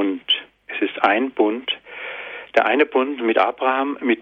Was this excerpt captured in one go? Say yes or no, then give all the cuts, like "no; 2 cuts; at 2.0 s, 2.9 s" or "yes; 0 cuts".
yes; 0 cuts